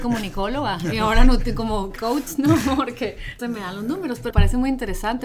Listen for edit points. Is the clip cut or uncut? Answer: cut